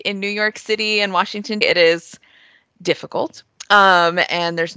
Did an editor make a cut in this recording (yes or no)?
yes